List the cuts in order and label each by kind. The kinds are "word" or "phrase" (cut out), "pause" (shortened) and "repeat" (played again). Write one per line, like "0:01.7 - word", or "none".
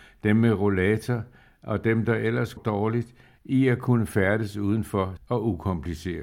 0:02.6 - word
0:05.2 - word